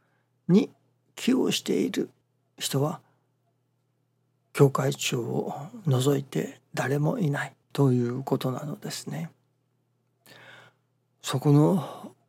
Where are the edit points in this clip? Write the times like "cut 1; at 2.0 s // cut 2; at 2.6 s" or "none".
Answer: cut 1; at 2.2 s // cut 2; at 7.6 s